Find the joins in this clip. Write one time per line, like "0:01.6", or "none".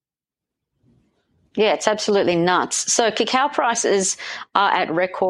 none